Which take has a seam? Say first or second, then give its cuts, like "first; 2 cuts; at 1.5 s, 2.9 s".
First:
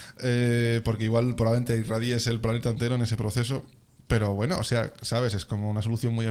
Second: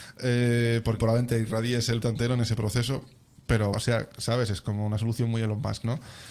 second; 3 cuts; at 1.0 s, 2.0 s, 3.7 s